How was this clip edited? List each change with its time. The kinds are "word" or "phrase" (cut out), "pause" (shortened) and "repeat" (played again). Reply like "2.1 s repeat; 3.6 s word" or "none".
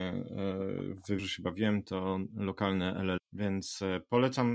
1.2 s word; 3.2 s word